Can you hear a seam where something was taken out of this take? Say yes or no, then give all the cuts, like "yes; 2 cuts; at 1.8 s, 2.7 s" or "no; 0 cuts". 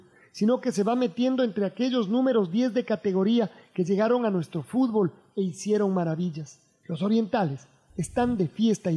no; 0 cuts